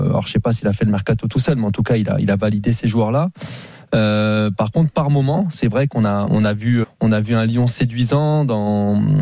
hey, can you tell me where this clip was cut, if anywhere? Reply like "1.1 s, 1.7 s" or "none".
6.3 s, 6.8 s

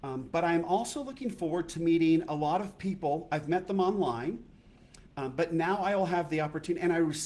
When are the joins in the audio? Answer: 5.1 s

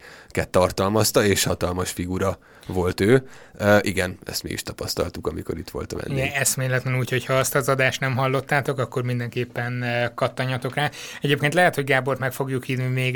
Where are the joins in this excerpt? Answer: none

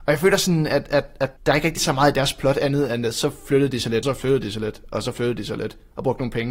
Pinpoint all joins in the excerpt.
1.4 s, 1.8 s, 4.0 s

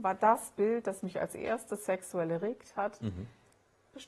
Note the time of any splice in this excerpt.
none

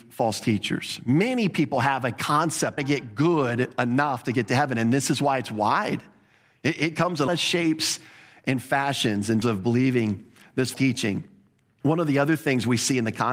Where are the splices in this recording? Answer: 2.8 s, 7.3 s, 9.4 s, 10.7 s

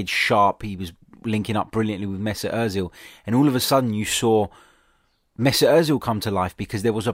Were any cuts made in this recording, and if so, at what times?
none

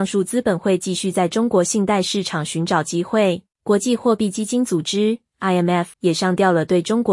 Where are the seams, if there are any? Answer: 3.5 s, 5.9 s

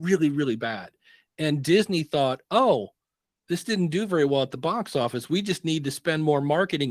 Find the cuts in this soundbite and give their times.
none

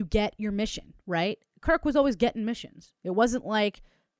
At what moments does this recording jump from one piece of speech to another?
1.5 s

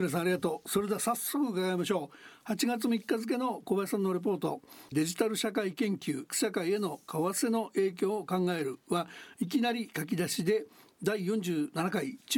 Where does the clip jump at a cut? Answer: 6.3 s

